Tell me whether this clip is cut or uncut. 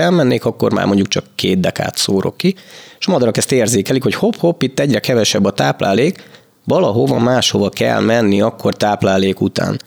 uncut